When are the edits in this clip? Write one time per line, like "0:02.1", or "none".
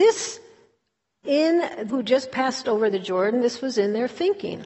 0:01.2
0:01.9